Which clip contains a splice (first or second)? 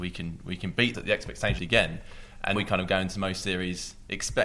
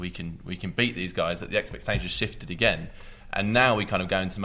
first